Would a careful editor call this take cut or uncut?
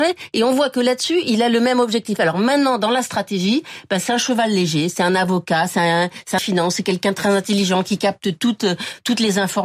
cut